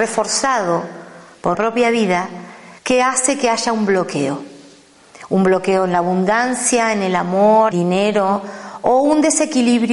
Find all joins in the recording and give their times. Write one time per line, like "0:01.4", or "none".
0:01.5
0:02.8
0:07.7